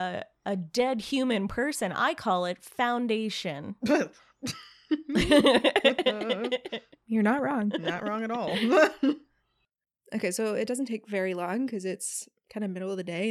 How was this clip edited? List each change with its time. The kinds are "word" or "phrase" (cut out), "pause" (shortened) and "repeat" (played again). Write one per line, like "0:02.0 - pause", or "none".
none